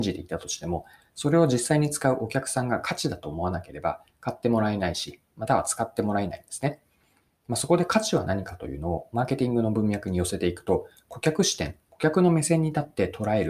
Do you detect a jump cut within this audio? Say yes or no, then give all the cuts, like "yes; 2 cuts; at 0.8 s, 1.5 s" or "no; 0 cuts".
no; 0 cuts